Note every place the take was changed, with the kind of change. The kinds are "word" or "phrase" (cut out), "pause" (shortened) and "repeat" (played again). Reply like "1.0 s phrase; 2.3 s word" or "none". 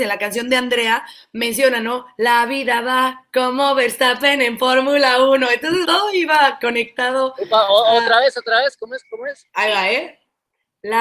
5.8 s word